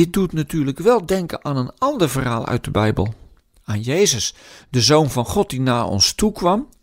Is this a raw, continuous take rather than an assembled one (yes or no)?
yes